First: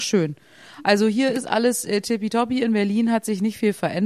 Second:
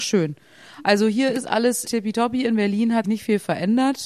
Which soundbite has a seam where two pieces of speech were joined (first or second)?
second